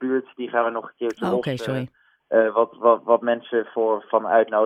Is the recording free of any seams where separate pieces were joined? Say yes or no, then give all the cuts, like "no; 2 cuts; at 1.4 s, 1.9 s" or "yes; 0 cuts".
yes; 0 cuts